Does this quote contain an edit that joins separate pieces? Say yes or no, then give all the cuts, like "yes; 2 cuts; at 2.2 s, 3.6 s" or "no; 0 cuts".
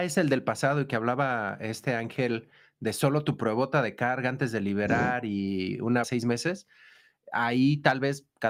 yes; 1 cut; at 6.0 s